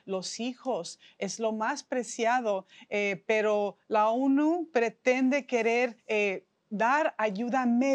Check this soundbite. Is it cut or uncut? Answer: cut